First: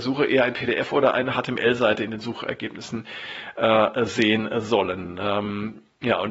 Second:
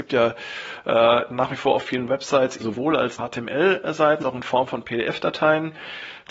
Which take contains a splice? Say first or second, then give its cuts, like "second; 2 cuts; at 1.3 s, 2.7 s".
second; 3 cuts; at 2.6 s, 3.2 s, 4.2 s